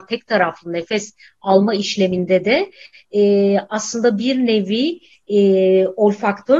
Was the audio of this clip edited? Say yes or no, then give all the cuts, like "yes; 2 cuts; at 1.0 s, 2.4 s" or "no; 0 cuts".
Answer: no; 0 cuts